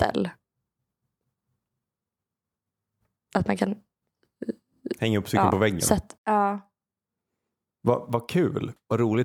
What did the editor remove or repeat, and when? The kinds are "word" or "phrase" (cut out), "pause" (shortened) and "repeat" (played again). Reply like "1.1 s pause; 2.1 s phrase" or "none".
6.2 s pause